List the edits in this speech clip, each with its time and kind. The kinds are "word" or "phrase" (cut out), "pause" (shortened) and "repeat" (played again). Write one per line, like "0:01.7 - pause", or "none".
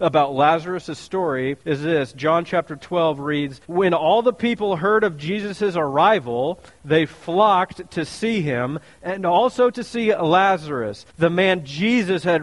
0:01.6 - pause
0:03.6 - pause
0:11.1 - pause